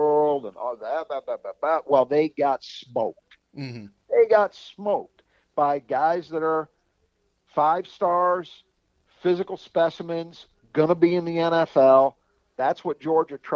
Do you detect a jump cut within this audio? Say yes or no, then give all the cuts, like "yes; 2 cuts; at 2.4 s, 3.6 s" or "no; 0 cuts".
no; 0 cuts